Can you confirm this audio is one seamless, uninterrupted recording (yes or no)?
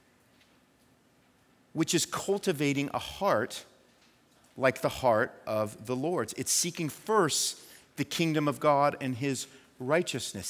yes